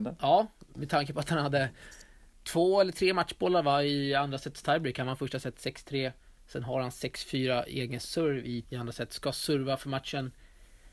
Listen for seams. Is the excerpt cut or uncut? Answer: cut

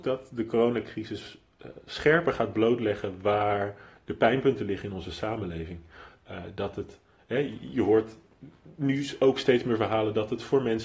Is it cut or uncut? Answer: uncut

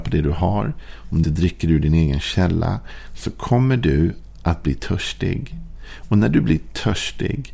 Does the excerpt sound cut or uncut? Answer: cut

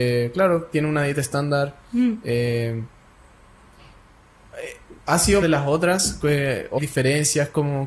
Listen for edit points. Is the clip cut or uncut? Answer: cut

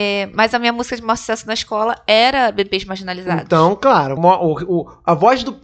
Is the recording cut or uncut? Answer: cut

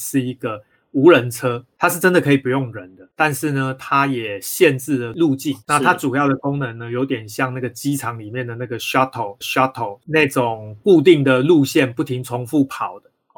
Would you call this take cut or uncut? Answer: cut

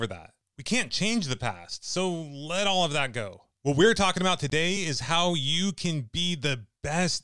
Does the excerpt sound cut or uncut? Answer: uncut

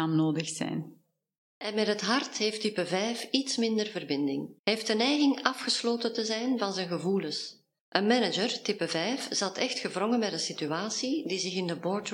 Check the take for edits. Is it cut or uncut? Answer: cut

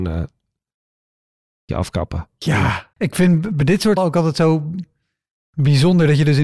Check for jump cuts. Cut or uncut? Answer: cut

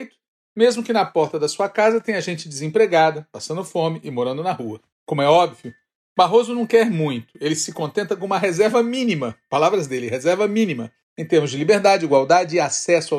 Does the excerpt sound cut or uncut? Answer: uncut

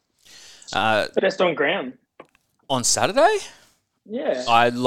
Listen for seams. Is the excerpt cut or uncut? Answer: cut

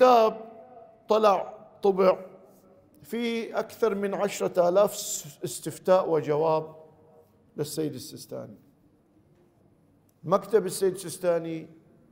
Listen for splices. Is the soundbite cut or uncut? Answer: uncut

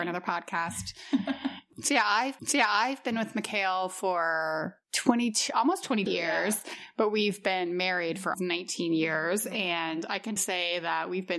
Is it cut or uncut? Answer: cut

